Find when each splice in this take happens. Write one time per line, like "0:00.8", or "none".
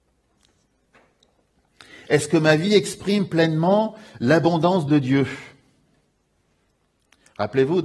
none